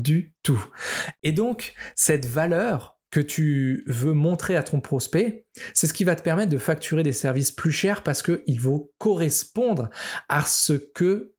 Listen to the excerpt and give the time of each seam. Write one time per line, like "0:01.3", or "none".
0:03.1